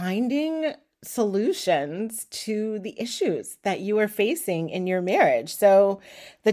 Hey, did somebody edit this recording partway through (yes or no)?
no